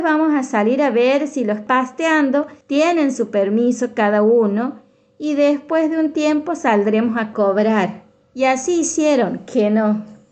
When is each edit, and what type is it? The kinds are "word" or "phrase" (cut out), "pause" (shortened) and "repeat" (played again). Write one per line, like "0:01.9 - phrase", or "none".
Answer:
0:01.7 - word
0:02.6 - pause
0:08.2 - pause